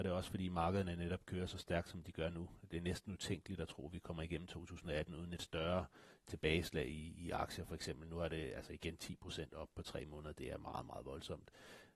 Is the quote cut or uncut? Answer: uncut